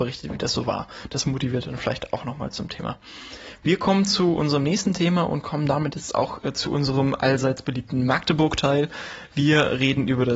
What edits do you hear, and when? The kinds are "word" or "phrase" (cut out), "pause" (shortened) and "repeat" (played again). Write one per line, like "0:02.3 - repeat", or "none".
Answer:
none